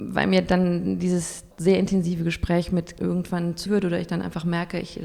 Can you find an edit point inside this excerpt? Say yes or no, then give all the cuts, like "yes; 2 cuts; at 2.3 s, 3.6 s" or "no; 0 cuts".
yes; 3 cuts; at 1.5 s, 3.0 s, 3.7 s